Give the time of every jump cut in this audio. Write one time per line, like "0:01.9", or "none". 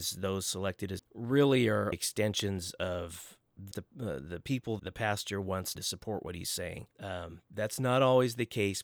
0:01.0
0:01.9
0:03.7
0:04.8
0:05.7
0:06.9